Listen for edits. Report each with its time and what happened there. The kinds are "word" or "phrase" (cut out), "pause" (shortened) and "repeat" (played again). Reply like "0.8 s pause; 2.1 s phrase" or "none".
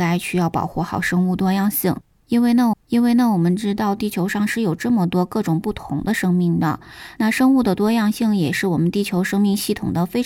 2.7 s repeat